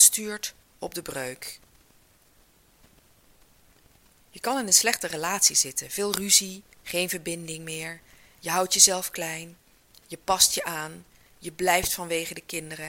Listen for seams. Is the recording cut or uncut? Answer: cut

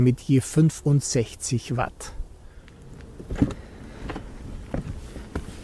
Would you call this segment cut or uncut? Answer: uncut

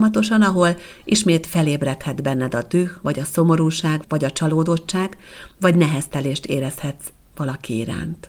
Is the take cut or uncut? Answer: uncut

